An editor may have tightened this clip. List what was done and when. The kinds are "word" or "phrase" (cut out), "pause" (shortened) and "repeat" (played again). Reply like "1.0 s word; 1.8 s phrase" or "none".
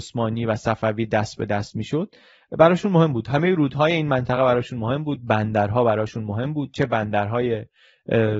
none

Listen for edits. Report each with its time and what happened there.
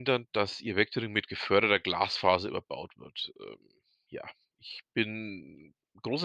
none

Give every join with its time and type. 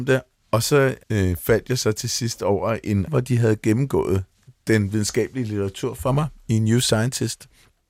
1.0 s word; 3.1 s word

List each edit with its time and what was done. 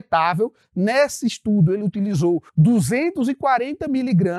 2.5 s pause

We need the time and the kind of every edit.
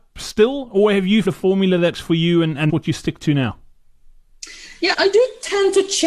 1.2 s word; 1.9 s word; 2.7 s word; 4.9 s word

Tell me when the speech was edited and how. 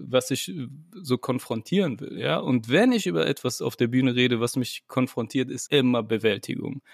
5.7 s word

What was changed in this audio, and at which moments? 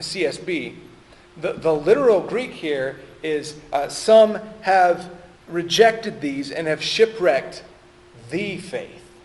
5.4 s pause

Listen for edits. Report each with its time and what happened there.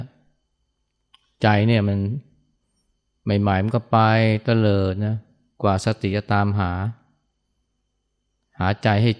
none

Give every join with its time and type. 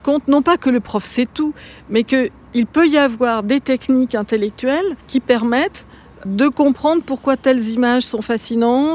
5.0 s pause; 6.2 s word

